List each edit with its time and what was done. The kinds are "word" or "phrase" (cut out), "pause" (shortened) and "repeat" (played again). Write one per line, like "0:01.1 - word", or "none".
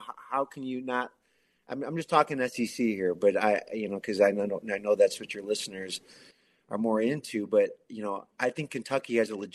none